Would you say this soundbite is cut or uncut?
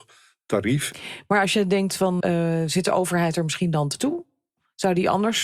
cut